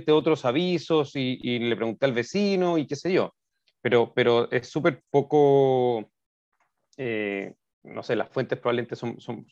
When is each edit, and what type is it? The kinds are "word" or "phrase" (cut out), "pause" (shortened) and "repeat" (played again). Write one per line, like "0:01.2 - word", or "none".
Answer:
0:05.0 - word